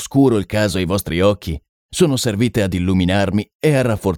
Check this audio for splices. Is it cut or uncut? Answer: uncut